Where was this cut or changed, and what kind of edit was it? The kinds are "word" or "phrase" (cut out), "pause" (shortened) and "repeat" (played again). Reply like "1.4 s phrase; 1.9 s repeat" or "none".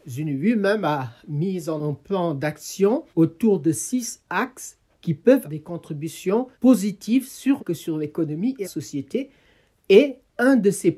1.8 s word; 3.1 s pause; 5.4 s word; 6.5 s pause; 7.6 s phrase; 8.6 s word